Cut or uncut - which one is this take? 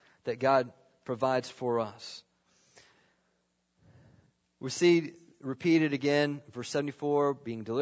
uncut